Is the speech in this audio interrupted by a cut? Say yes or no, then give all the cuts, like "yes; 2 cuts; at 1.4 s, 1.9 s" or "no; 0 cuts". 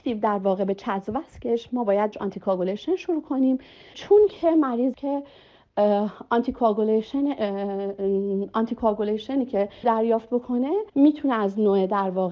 yes; 5 cuts; at 2.1 s, 3.9 s, 4.9 s, 9.8 s, 10.9 s